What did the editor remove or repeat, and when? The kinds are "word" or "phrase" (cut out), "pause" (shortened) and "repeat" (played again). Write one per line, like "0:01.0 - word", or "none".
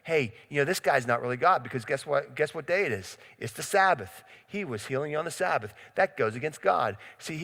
none